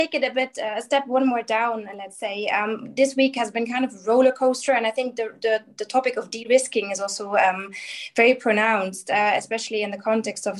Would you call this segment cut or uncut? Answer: uncut